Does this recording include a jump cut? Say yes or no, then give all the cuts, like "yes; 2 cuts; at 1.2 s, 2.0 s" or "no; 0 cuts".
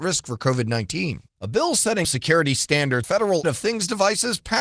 yes; 4 cuts; at 1.3 s, 2.0 s, 3.0 s, 3.4 s